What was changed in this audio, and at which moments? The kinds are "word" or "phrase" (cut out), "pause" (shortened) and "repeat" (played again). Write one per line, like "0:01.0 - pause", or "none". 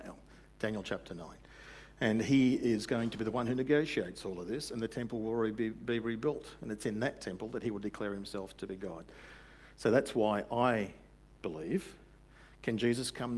none